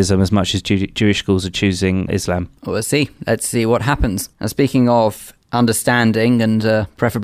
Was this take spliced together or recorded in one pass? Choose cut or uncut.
cut